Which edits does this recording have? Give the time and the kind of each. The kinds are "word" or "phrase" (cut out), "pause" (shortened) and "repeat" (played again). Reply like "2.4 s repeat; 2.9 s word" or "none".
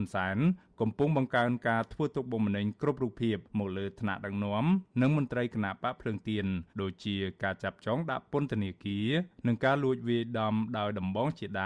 3.4 s pause; 6.7 s pause